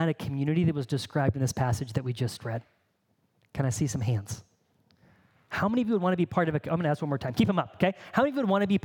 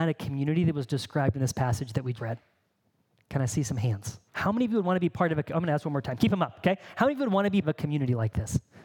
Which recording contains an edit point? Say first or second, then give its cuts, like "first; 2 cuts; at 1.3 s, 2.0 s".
second; 3 cuts; at 2.1 s, 4.3 s, 7.6 s